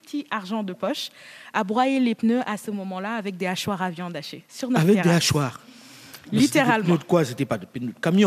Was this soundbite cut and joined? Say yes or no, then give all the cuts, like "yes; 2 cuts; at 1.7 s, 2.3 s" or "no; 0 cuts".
no; 0 cuts